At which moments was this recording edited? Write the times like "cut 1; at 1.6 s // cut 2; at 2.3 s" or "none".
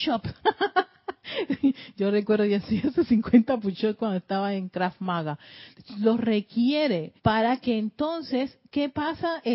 cut 1; at 7.2 s